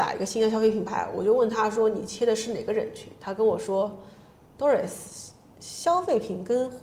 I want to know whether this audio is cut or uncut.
uncut